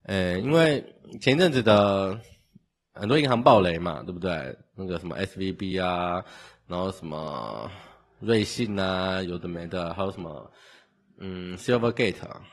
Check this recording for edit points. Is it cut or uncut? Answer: uncut